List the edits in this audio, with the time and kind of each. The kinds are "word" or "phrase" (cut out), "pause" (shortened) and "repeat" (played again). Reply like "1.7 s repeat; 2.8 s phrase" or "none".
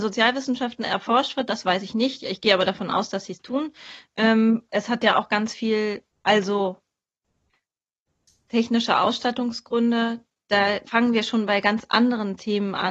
4.7 s word; 6.1 s pause; 10.9 s word